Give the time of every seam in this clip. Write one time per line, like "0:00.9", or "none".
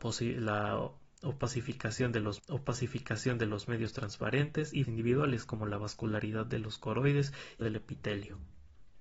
0:02.4
0:04.8
0:07.6